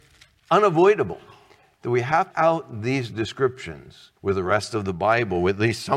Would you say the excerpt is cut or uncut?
cut